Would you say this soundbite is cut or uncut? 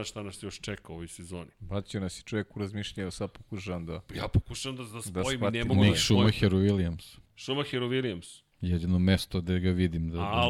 cut